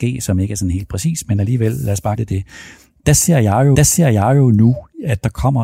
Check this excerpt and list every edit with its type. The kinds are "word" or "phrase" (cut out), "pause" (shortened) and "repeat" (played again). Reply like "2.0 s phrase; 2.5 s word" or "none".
2.2 s word; 3.7 s repeat